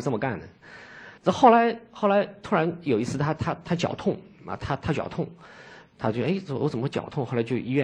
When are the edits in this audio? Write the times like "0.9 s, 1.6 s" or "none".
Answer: 1.2 s